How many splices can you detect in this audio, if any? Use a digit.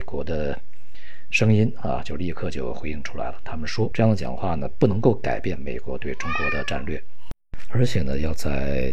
1